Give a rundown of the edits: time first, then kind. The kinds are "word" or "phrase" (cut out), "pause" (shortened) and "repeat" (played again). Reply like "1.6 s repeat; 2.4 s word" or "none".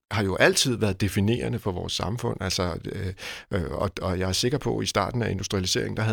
none